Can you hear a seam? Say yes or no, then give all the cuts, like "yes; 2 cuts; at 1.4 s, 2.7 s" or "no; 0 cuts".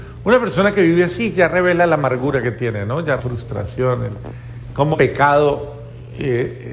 yes; 2 cuts; at 3.2 s, 4.9 s